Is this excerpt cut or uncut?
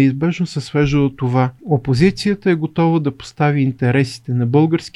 cut